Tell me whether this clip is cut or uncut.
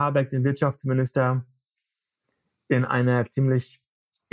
uncut